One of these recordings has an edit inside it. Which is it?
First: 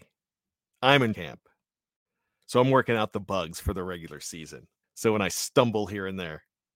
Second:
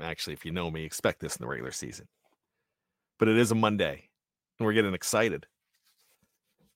first; 2 cuts; at 1.1 s, 4.8 s

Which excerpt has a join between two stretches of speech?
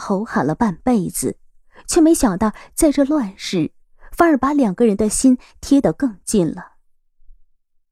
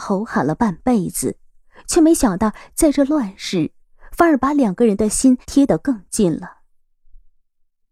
second; 1 cut; at 5.4 s

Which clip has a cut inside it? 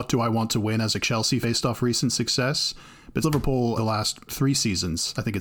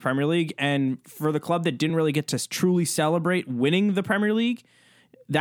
first; 4 cuts; at 1.4 s, 3.2 s, 3.8 s, 4.3 s

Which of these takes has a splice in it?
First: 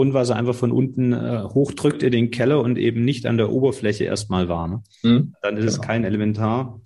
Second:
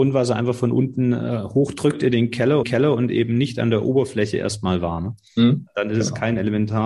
second; 1 cut; at 2.6 s

